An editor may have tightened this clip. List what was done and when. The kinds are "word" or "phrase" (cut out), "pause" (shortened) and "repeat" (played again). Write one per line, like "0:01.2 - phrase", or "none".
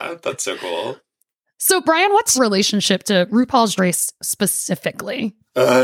0:02.3 - word
0:03.8 - word